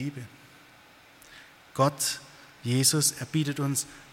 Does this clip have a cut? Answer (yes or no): no